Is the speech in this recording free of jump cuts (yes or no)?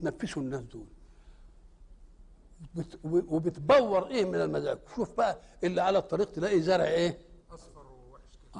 no